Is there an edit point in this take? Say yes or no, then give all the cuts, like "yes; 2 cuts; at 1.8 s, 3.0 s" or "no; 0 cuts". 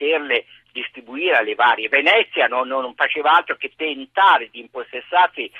no; 0 cuts